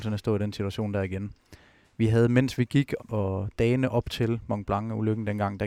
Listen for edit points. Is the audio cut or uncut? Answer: cut